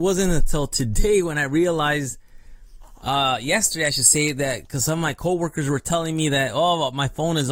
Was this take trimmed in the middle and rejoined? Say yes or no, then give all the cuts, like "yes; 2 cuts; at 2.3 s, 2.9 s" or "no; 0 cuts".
no; 0 cuts